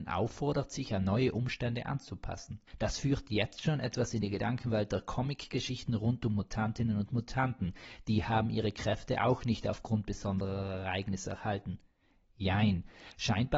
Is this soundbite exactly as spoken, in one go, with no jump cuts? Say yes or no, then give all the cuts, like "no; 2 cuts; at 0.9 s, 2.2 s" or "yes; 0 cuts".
no; 1 cut; at 2.7 s